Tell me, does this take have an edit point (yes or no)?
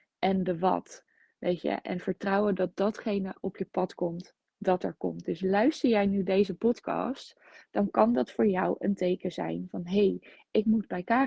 no